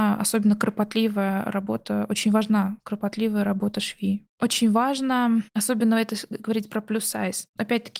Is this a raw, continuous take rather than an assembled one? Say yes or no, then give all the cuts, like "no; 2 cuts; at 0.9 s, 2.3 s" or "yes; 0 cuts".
no; 1 cut; at 2.8 s